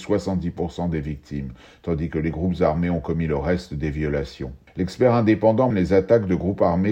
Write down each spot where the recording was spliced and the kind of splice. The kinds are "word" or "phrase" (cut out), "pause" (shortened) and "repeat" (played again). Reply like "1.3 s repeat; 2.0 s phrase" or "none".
5.7 s word